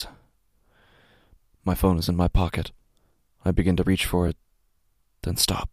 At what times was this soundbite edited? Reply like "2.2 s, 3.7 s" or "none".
none